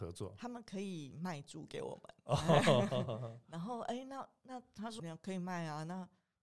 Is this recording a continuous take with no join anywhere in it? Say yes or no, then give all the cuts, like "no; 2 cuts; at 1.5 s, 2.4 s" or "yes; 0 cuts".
no; 1 cut; at 5.0 s